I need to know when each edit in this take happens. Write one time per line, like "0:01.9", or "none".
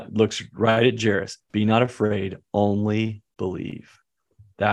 0:01.4